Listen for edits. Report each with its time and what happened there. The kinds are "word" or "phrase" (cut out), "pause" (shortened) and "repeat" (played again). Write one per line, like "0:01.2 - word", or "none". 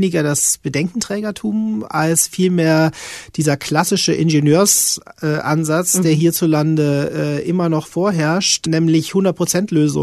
none